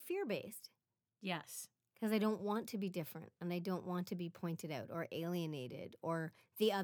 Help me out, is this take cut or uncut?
uncut